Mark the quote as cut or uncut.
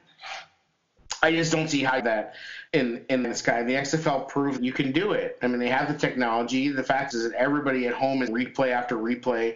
cut